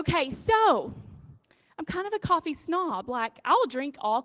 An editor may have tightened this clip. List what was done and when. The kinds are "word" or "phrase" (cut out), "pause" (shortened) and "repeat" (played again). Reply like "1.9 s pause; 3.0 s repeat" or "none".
none